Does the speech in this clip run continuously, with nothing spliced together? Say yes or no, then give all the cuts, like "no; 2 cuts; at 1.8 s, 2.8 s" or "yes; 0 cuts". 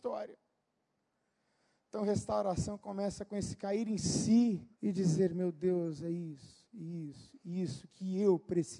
no; 1 cut; at 4.7 s